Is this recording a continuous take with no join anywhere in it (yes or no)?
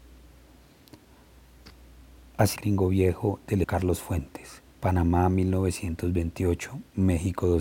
no